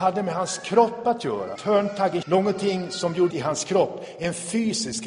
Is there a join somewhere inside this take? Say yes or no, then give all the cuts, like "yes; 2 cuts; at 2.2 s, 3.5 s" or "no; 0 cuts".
yes; 3 cuts; at 1.6 s, 2.2 s, 3.3 s